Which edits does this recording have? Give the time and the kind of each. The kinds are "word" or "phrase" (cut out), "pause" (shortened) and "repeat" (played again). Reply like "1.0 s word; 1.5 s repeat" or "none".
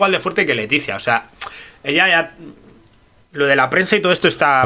none

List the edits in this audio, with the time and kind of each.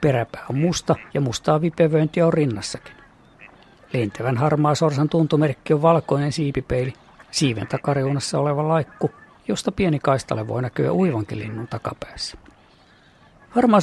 1.1 s pause

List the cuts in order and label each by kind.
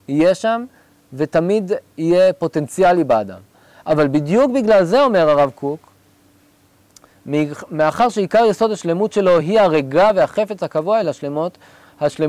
none

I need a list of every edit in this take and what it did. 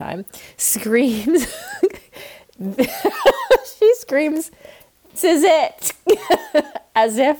5.2 s word

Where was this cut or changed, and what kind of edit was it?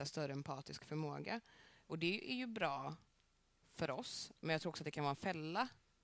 none

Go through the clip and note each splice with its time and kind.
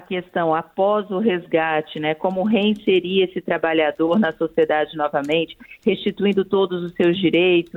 none

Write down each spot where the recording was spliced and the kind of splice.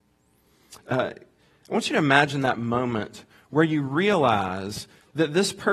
none

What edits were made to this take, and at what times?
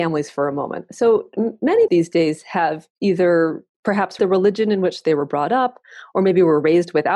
1.9 s word; 4.2 s word

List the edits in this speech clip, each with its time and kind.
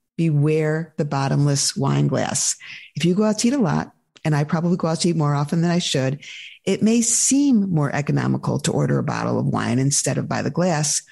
none

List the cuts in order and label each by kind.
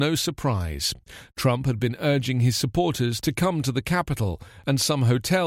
none

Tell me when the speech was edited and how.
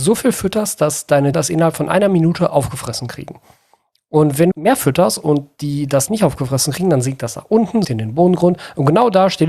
1.3 s word; 4.5 s word; 6.1 s word; 7.8 s word

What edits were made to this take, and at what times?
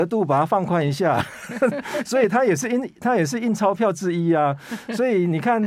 none

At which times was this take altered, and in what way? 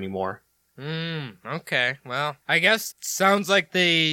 2.4 s pause; 2.9 s word

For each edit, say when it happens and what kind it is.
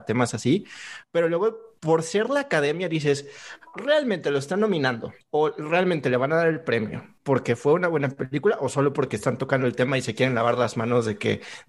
1.8 s pause; 5.2 s pause; 7.2 s pause

